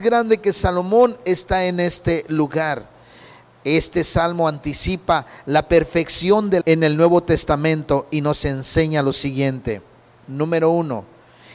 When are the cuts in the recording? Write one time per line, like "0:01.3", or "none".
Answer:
0:06.6